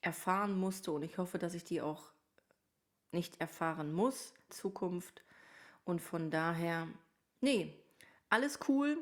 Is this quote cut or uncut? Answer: cut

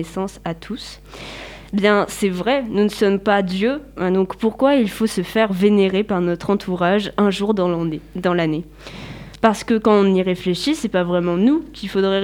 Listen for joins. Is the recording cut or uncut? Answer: uncut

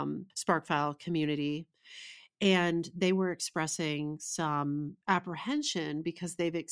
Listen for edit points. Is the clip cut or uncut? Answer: uncut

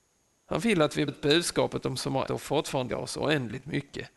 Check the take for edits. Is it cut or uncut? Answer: cut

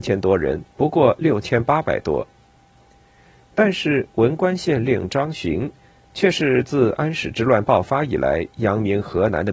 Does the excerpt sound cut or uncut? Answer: uncut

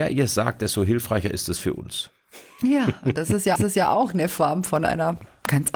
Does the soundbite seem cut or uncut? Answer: cut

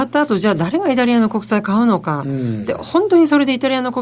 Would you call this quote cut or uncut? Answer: uncut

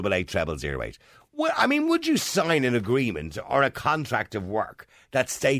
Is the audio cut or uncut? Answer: uncut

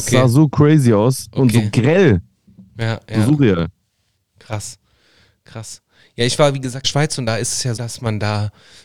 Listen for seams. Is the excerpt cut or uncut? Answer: cut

